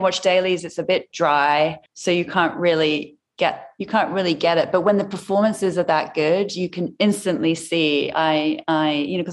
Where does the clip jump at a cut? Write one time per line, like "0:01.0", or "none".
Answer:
0:01.9
0:03.8

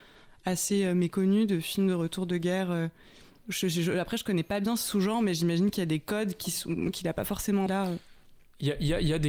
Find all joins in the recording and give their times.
0:07.7

